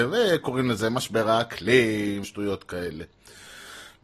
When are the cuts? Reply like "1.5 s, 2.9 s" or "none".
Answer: 2.2 s